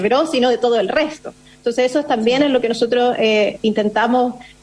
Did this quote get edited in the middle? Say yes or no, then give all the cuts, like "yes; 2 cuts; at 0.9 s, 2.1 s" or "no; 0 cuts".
no; 0 cuts